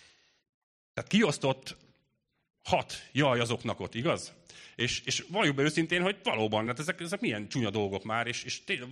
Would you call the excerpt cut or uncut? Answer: uncut